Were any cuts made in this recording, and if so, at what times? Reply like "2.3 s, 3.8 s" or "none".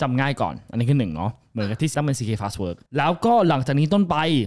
1.9 s, 2.9 s